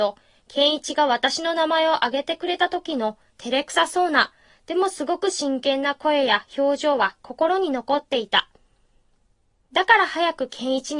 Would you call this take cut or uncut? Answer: uncut